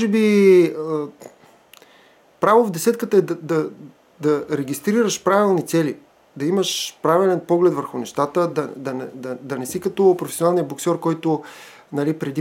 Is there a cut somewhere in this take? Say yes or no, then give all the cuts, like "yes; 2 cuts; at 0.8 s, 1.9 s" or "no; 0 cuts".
no; 0 cuts